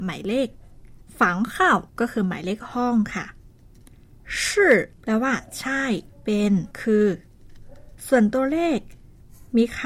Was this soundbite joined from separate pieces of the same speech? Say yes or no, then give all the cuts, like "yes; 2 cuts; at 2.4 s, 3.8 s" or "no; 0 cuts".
yes; 6 cuts; at 1.0 s, 1.9 s, 4.9 s, 6.1 s, 6.7 s, 8.0 s